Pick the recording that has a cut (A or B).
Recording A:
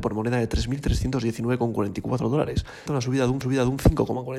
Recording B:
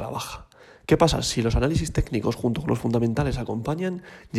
A